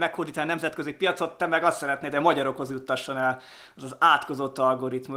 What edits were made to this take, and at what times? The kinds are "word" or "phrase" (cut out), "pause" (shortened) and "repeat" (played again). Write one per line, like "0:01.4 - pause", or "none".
none